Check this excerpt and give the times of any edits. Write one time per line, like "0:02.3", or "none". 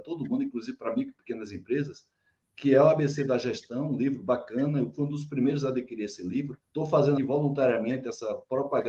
0:06.6
0:07.2